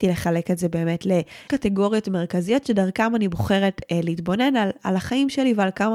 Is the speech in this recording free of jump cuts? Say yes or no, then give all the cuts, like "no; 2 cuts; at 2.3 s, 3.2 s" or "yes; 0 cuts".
no; 1 cut; at 1.5 s